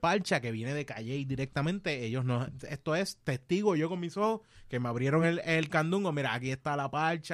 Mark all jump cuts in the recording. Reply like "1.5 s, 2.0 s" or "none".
none